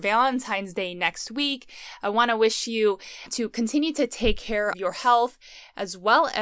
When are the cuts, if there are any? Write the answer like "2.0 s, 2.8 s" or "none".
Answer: 4.7 s

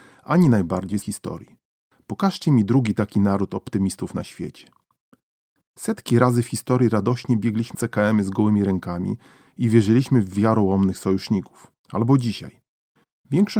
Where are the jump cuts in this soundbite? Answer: 1.0 s, 7.7 s

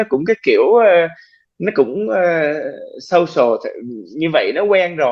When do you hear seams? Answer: none

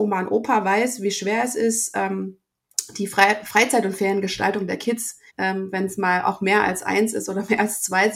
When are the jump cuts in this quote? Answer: 5.3 s

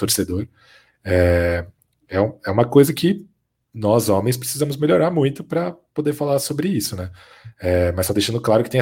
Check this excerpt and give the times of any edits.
none

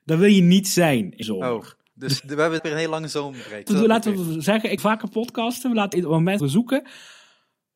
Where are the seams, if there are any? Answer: 1.2 s, 2.2 s, 2.6 s, 3.7 s, 4.8 s, 5.9 s, 6.4 s

